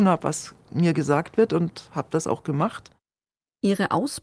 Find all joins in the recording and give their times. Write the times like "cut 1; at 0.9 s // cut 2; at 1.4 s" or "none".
none